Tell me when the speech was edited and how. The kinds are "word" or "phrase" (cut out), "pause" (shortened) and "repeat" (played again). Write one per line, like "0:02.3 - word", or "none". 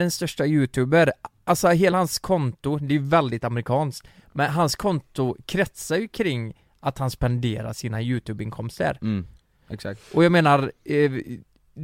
none